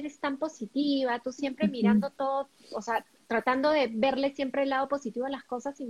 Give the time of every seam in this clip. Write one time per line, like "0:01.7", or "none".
none